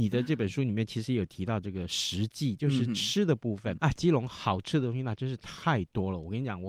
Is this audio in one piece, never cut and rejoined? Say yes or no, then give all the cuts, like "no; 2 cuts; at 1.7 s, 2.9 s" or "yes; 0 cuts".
no; 1 cut; at 3.8 s